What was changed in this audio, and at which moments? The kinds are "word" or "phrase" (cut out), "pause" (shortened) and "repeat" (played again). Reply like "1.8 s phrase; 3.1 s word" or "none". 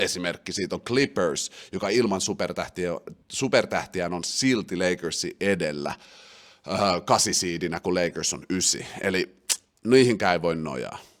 3.2 s pause